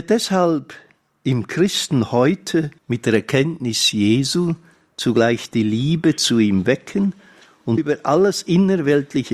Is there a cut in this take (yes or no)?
yes